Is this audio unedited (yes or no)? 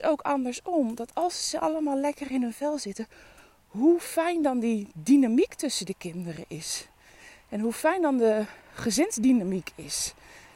yes